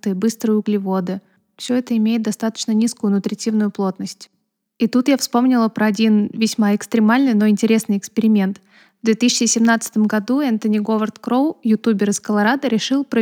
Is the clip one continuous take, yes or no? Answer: yes